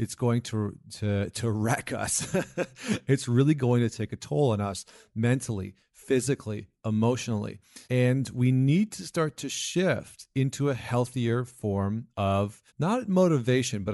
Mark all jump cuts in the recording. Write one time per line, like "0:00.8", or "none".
0:07.8
0:12.7